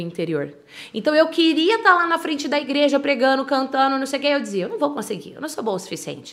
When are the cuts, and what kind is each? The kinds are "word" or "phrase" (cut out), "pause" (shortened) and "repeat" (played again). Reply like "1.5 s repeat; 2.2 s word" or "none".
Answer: none

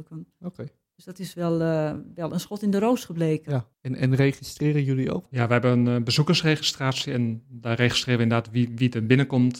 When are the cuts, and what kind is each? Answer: 3.7 s pause

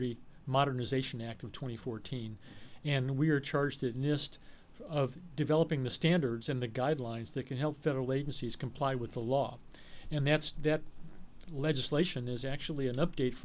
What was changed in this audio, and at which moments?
none

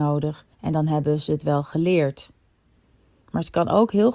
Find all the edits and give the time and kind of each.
none

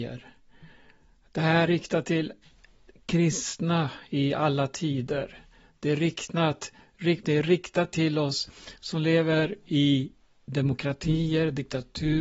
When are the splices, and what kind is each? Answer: 1.7 s word; 7.2 s word

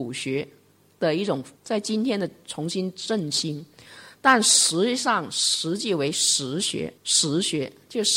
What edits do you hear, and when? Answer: 1.6 s pause; 7.0 s pause

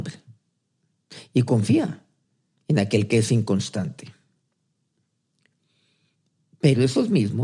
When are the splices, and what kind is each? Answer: 2.2 s pause

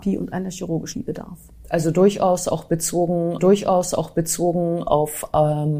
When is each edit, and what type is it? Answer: 0.9 s word; 3.4 s repeat

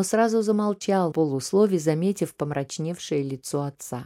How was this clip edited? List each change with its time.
1.1 s word

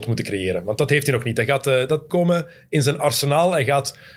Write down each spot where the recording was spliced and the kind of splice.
2.1 s phrase

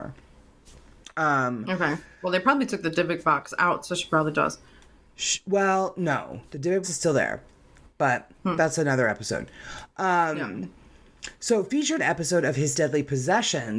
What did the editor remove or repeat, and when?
6.8 s word; 12.0 s phrase; 12.7 s word

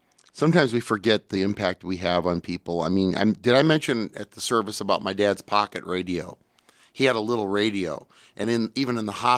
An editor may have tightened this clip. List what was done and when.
none

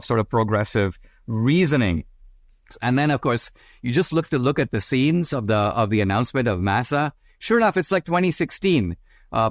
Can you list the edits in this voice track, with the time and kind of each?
none

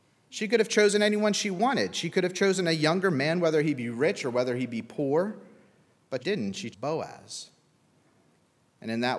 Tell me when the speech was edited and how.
6.2 s word; 6.7 s word

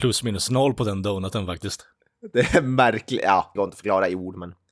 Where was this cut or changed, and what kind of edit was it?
3.6 s phrase

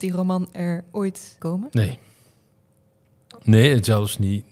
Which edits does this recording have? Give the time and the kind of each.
1.4 s word

